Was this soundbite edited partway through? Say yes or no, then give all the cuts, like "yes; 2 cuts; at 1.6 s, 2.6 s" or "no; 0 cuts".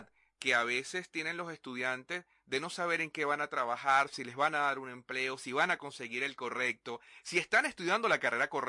no; 0 cuts